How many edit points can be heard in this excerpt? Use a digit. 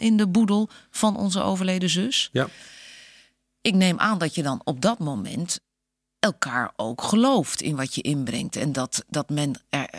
0